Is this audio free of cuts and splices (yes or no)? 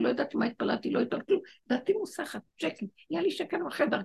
no